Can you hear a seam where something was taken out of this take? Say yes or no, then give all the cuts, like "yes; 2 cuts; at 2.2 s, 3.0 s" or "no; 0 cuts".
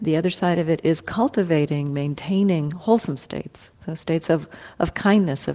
yes; 1 cut; at 3.8 s